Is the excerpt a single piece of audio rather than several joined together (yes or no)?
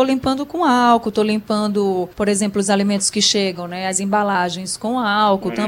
no